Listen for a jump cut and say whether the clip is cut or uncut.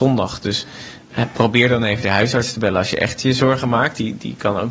uncut